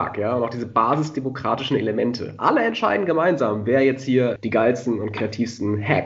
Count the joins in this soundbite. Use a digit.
1